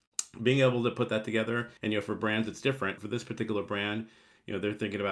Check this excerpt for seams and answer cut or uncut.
cut